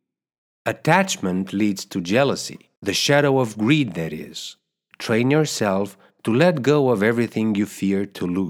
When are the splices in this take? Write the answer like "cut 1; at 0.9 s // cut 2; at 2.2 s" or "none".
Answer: cut 1; at 2.8 s